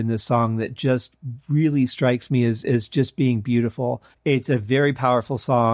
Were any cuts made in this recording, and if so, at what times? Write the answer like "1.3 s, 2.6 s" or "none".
4.1 s